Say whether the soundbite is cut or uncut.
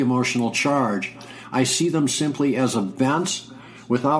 uncut